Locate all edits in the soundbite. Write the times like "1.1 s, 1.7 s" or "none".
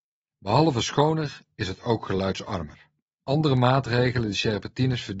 3.0 s

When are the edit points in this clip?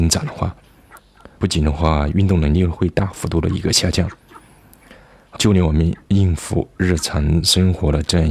1.4 s, 5.4 s

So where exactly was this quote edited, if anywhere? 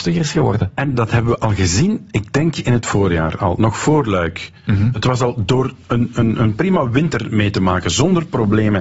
6.1 s

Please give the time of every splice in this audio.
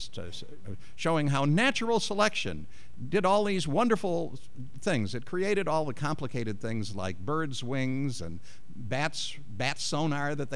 none

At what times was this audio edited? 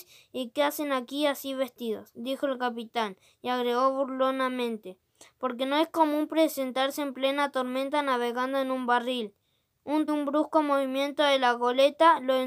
10.1 s

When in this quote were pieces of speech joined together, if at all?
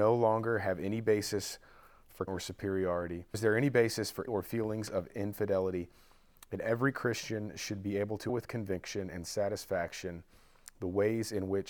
2.3 s, 3.3 s, 4.3 s, 8.3 s

